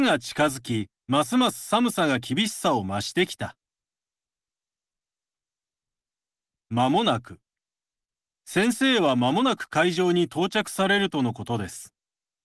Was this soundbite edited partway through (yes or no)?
yes